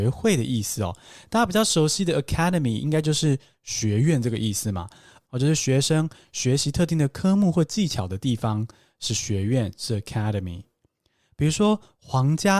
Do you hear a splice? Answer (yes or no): no